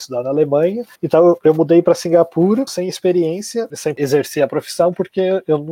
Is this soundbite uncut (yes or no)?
no